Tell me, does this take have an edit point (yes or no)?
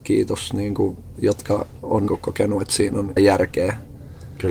yes